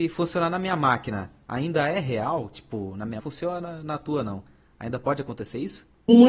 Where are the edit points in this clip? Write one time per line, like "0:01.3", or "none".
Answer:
0:03.2